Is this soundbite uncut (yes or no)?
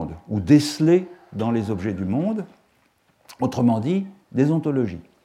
no